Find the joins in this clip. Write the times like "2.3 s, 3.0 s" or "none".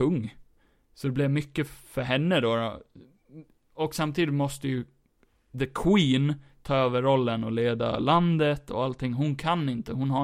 none